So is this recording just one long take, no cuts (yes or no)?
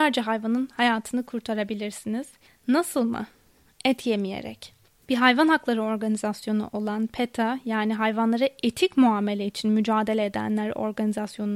yes